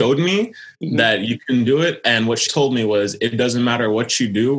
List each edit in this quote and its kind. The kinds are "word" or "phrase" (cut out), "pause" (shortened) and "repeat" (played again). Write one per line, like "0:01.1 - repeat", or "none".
0:02.5 - word